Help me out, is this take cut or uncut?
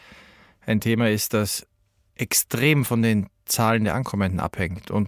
uncut